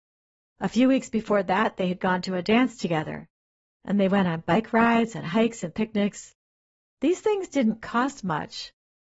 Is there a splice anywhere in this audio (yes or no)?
no